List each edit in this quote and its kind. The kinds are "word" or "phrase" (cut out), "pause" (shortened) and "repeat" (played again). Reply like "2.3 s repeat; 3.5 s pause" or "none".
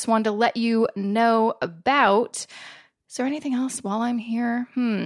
none